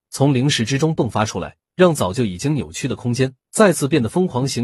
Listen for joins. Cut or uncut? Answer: cut